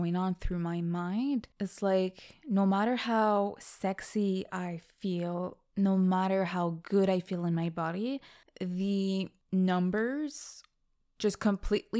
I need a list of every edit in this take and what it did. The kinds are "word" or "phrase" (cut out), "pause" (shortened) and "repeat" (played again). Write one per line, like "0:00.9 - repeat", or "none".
0:01.5 - pause